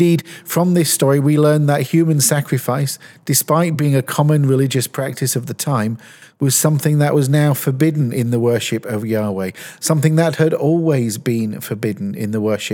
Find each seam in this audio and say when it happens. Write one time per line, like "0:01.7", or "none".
none